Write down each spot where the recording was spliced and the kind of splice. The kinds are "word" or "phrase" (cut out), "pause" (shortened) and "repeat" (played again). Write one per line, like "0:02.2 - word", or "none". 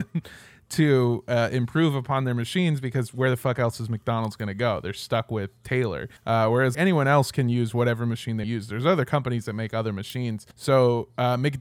0:06.2 - pause
0:06.7 - word
0:08.4 - phrase
0:10.5 - pause